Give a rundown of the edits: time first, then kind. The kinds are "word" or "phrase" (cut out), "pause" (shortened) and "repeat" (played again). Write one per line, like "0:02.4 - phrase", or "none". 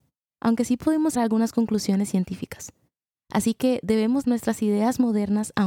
0:01.1 - word
0:04.2 - word